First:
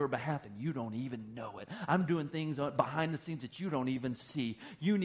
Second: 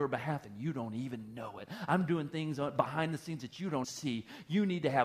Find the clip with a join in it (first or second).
second